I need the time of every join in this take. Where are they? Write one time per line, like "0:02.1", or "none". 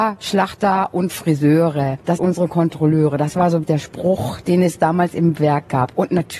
0:02.2
0:03.6